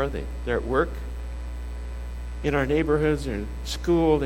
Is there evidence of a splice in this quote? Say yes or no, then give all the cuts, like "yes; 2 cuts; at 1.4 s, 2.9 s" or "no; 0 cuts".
no; 0 cuts